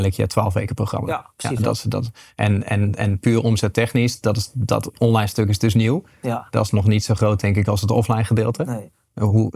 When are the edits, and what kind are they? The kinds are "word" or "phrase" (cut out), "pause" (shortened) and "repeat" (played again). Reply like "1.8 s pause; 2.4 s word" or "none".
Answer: none